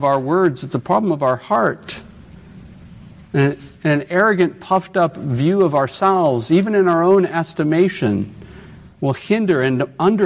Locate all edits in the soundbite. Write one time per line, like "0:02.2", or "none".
none